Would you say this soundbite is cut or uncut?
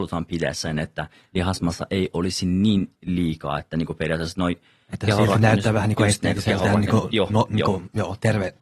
uncut